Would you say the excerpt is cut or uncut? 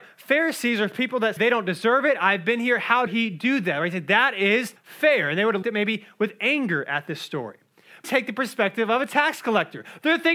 cut